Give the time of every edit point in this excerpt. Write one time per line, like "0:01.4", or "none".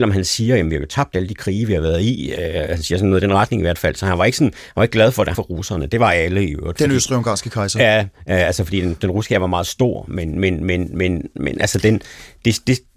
0:05.3